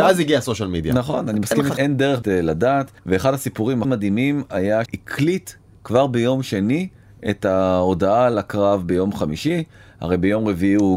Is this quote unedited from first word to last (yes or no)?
no